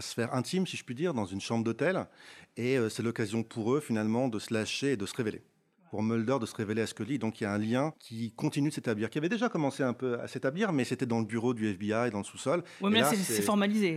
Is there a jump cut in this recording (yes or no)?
no